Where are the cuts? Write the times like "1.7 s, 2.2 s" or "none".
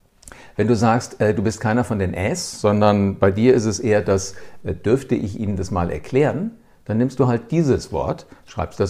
none